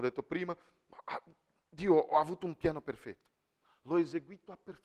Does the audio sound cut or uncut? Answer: uncut